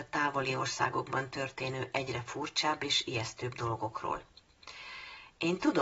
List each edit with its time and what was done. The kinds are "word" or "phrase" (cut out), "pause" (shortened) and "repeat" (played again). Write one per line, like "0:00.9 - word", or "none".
none